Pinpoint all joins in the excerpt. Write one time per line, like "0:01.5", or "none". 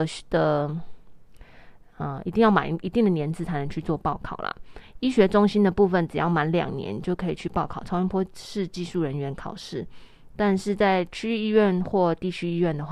none